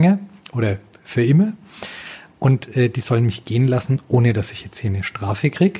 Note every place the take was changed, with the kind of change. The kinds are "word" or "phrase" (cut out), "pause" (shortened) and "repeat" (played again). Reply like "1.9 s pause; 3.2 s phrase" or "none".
none